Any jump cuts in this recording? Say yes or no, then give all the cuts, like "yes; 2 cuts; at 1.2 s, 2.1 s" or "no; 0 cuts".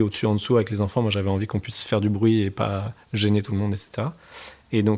no; 0 cuts